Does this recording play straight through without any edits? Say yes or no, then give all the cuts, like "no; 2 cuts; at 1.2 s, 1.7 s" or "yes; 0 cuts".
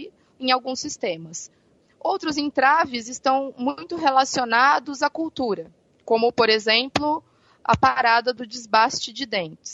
yes; 0 cuts